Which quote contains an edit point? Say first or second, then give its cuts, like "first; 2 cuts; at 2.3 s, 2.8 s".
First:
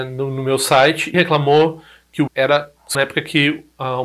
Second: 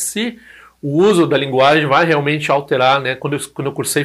first; 3 cuts; at 1.1 s, 2.3 s, 2.9 s